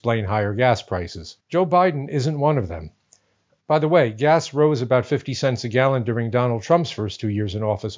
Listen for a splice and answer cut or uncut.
cut